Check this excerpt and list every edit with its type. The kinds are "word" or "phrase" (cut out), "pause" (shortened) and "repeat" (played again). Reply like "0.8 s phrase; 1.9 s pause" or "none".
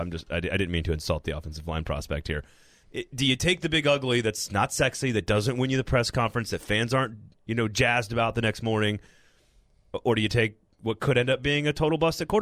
2.8 s word